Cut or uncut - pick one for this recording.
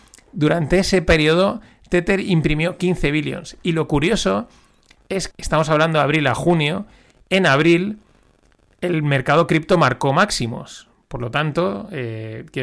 cut